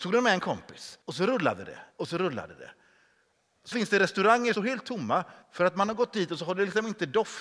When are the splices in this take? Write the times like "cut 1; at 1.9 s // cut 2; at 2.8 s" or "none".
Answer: cut 1; at 1.0 s // cut 2; at 1.9 s // cut 3; at 3.7 s // cut 4; at 4.5 s // cut 5; at 5.4 s